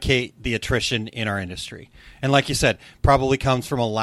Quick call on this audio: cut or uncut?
uncut